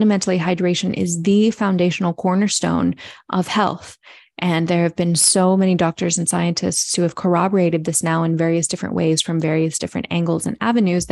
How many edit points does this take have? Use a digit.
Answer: 0